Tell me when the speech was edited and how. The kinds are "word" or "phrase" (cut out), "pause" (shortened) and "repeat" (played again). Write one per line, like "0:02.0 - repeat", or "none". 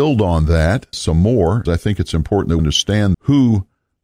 0:00.9 - word
0:01.7 - word
0:02.6 - word
0:03.1 - word